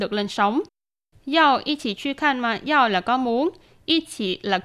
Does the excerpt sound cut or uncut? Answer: uncut